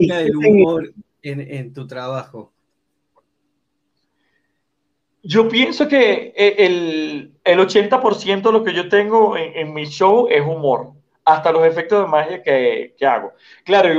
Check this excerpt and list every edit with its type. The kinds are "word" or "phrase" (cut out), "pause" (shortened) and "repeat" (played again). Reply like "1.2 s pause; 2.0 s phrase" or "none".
7.4 s pause